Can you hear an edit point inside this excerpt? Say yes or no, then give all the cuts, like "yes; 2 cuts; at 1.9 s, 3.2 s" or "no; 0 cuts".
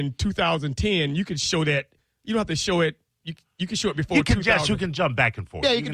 no; 0 cuts